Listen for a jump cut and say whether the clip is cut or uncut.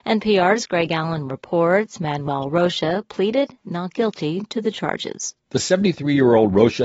cut